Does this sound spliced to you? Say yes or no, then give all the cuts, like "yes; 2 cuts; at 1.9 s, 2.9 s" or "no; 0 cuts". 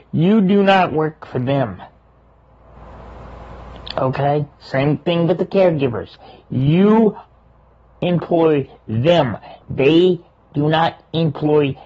yes; 2 cuts; at 4.5 s, 9.6 s